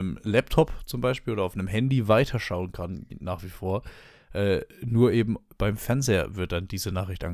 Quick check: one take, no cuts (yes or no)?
yes